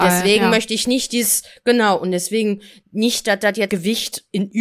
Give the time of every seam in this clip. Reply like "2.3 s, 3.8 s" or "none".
3.7 s